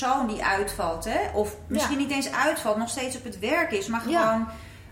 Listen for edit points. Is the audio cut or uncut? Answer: uncut